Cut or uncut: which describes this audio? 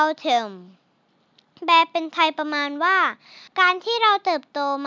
cut